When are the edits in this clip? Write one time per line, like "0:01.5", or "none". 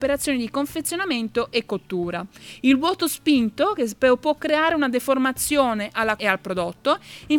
0:06.2